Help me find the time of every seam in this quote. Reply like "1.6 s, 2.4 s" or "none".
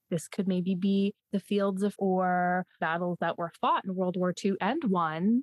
1.2 s, 1.9 s, 2.8 s